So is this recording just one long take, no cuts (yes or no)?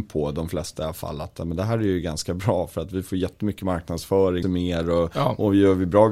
no